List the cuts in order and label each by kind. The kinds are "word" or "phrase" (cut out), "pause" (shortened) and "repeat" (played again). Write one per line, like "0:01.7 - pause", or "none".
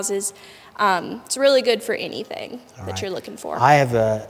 none